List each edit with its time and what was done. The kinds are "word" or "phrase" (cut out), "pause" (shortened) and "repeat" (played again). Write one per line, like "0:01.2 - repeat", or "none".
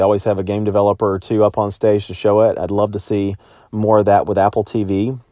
none